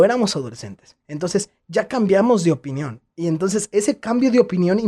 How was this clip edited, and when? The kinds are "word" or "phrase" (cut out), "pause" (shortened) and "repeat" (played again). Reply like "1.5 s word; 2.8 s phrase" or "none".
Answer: 1.0 s pause; 3.1 s pause